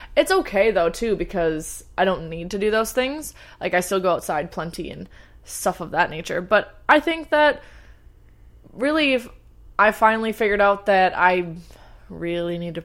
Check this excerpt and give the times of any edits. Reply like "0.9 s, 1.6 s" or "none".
none

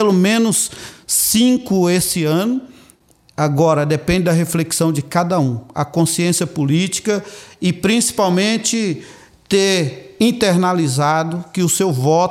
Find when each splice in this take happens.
none

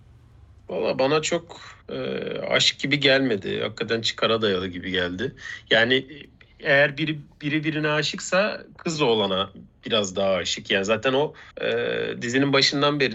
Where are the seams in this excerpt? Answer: 1.8 s, 11.5 s

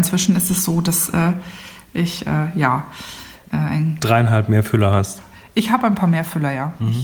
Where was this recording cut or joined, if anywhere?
none

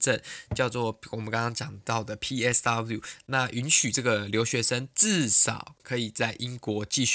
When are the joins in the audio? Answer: none

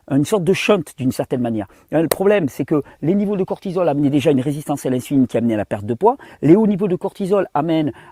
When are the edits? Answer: none

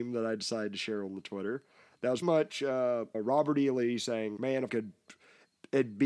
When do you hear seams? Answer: 2.2 s, 3.1 s, 4.4 s, 4.7 s

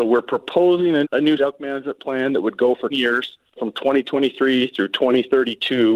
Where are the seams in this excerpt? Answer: 1.0 s, 1.4 s, 2.9 s, 3.6 s

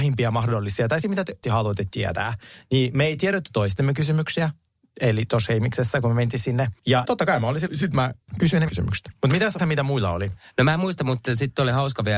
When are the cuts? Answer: 1.0 s, 1.4 s, 7.0 s, 7.7 s, 8.7 s, 9.6 s

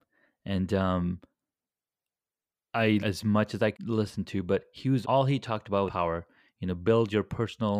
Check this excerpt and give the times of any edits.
3.0 s, 3.7 s, 5.0 s, 5.9 s

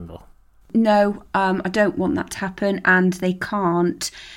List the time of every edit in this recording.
none

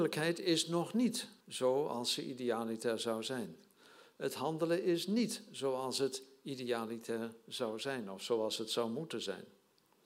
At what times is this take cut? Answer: 1.4 s

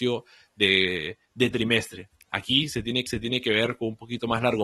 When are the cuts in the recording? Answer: 1.5 s, 3.1 s

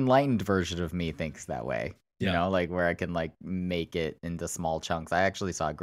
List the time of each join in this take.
none

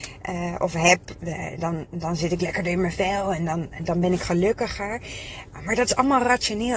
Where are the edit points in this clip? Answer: none

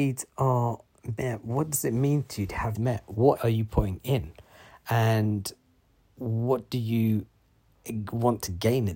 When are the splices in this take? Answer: 2.7 s, 3.4 s

